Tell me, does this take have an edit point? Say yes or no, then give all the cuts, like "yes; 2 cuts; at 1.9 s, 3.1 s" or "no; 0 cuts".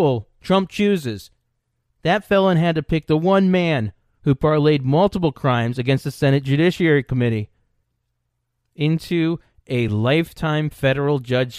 no; 0 cuts